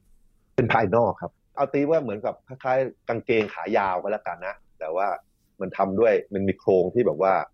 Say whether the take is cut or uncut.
uncut